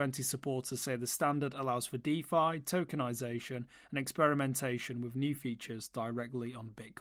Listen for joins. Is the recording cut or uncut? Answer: uncut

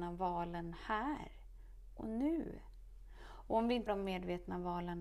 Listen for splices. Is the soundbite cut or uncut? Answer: cut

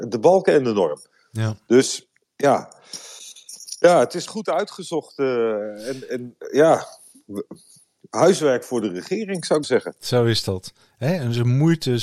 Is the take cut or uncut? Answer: cut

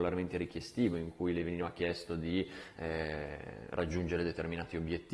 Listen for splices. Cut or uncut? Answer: uncut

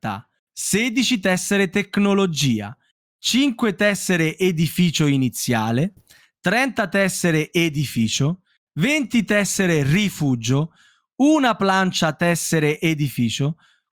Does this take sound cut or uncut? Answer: uncut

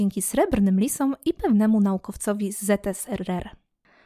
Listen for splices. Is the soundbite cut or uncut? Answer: uncut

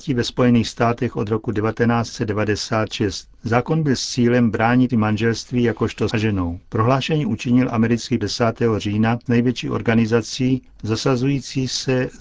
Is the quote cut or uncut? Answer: cut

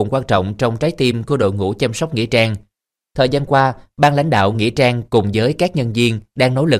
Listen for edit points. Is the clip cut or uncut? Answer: uncut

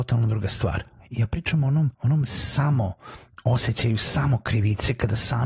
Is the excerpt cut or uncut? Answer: cut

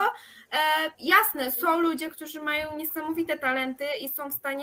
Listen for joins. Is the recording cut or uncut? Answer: cut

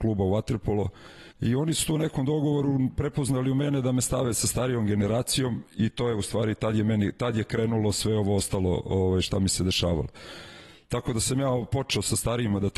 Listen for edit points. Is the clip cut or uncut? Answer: cut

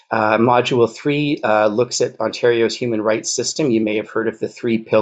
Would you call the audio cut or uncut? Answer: uncut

